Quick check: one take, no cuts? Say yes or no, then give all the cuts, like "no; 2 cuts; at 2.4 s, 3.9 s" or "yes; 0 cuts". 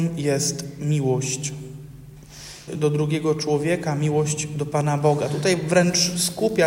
no; 1 cut; at 2.7 s